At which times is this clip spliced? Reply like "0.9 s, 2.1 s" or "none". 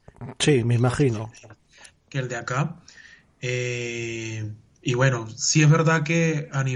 none